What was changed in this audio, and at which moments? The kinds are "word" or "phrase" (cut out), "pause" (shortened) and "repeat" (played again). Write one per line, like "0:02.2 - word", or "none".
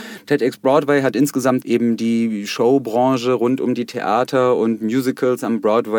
0:01.6 - phrase